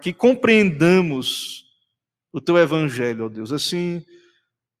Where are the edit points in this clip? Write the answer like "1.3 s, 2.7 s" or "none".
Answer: none